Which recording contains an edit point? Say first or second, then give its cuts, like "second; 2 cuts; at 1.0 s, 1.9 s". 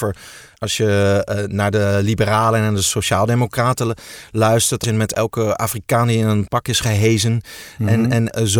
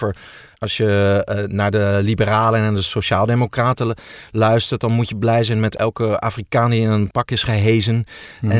first; 1 cut; at 4.8 s